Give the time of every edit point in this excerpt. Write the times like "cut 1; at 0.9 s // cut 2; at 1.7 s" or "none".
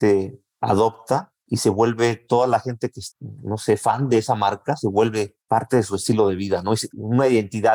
cut 1; at 1.4 s // cut 2; at 5.4 s